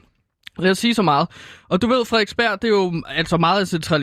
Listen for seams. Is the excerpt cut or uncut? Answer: uncut